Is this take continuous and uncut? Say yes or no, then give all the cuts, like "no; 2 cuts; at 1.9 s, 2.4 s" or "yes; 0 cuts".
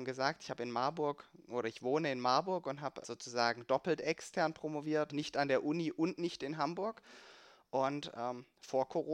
no; 2 cuts; at 3.0 s, 5.1 s